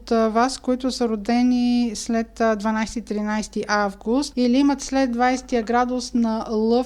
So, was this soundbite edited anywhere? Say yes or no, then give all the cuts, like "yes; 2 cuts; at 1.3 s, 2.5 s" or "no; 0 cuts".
no; 0 cuts